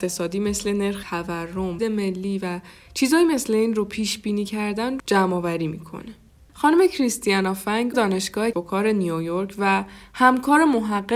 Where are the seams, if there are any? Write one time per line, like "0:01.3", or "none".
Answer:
0:01.0
0:01.8
0:05.0
0:07.9
0:08.5